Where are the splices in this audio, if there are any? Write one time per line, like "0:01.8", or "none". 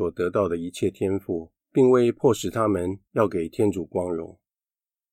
0:01.6
0:03.0

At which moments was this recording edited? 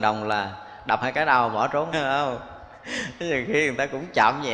0:01.0
0:01.9

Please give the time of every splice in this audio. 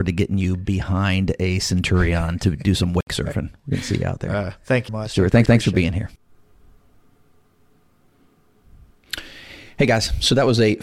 0:04.9
0:05.5

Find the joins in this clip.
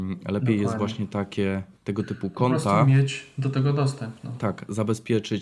0:01.8

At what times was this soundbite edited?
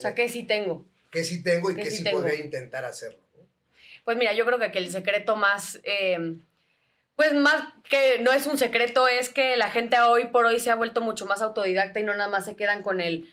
none

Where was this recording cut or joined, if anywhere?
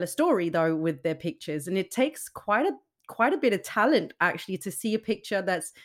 none

